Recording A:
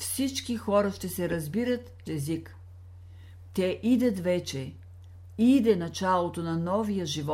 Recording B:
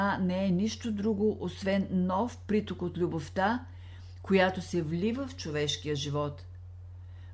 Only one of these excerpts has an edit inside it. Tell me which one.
A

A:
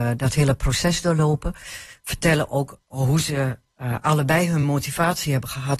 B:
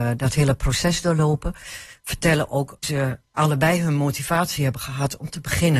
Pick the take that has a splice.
B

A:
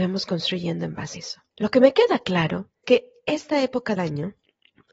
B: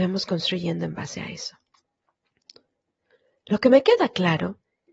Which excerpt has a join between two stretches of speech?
A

